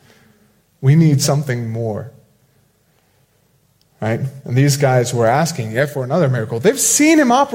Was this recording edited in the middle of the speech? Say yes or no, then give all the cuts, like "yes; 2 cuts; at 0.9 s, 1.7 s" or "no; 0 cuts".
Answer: no; 0 cuts